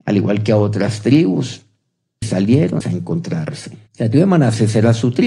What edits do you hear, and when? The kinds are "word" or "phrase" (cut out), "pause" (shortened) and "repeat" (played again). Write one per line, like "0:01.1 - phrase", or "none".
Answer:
0:02.2 - word
0:02.8 - word
0:03.9 - pause